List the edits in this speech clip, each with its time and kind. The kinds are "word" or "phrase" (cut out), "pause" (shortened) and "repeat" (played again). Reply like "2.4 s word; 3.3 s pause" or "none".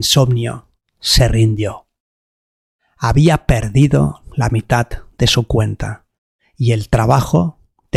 none